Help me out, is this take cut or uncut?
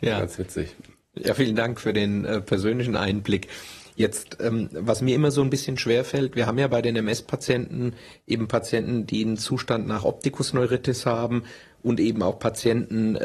uncut